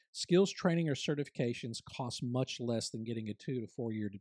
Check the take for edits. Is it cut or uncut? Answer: uncut